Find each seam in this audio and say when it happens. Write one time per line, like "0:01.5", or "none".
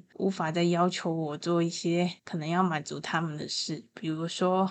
0:02.2